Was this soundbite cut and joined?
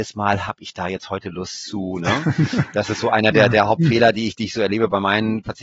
no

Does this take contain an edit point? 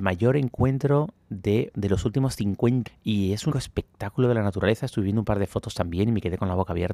yes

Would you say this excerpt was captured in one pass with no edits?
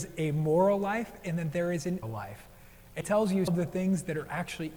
no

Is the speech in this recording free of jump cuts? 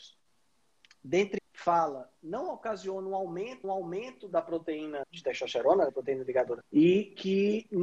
no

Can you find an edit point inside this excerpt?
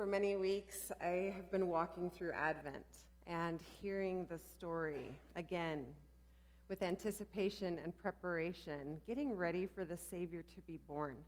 yes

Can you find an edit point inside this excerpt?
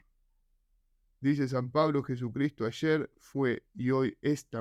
no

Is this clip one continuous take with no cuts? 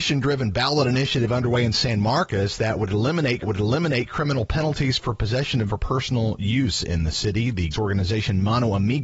no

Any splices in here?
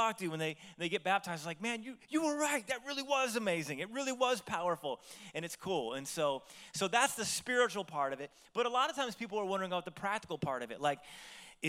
no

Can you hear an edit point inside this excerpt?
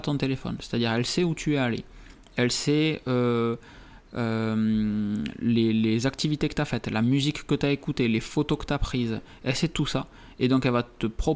no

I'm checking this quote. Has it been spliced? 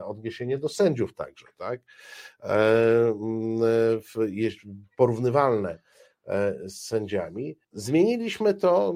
yes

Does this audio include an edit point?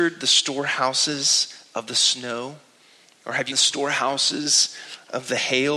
yes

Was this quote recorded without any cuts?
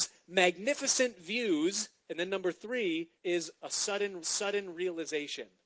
no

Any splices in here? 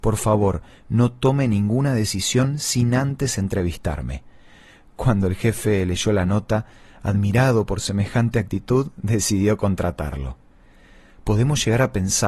no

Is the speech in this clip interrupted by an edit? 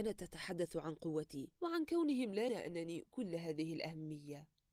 yes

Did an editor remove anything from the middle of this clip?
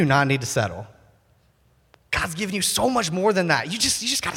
no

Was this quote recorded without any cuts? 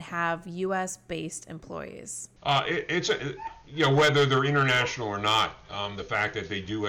no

